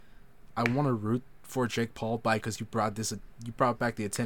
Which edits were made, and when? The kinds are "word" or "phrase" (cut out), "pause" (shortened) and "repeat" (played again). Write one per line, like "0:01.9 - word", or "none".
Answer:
0:02.4 - word